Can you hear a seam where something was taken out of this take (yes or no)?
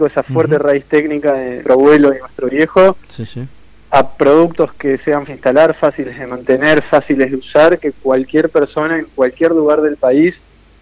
yes